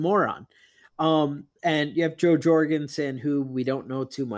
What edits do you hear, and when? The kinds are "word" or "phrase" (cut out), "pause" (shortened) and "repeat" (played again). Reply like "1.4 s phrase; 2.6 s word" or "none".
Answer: 1.5 s pause

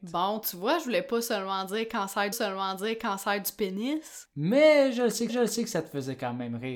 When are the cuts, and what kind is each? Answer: 2.3 s repeat; 5.3 s repeat

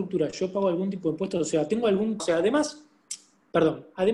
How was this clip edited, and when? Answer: 2.2 s word

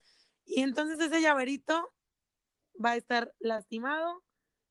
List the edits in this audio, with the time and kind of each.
none

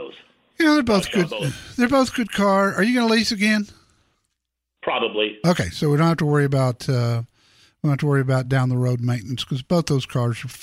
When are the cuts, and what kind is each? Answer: none

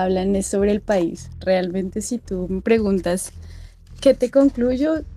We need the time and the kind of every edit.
none

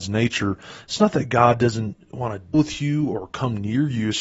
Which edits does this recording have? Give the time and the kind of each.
2.5 s word

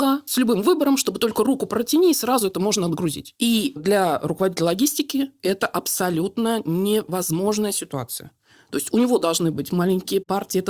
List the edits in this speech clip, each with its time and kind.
none

